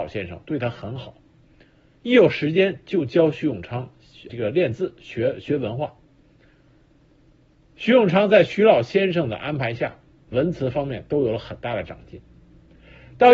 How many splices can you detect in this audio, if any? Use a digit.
2